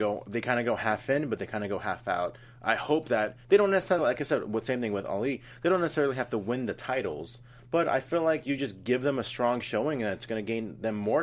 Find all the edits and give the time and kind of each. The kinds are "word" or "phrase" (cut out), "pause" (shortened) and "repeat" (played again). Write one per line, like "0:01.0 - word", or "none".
none